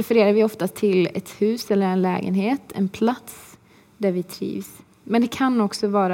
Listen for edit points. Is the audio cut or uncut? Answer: uncut